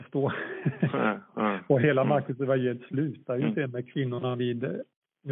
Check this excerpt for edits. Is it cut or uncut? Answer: uncut